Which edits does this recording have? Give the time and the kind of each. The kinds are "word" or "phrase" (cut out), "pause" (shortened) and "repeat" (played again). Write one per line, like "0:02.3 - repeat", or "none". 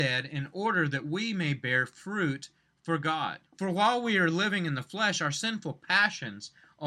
0:03.5 - pause